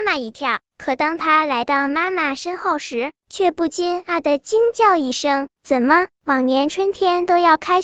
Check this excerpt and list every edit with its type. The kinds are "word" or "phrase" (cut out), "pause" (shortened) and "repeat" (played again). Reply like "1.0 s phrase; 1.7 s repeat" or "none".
5.5 s pause